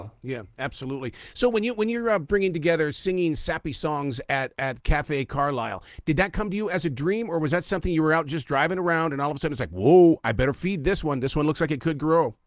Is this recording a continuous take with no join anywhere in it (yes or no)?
yes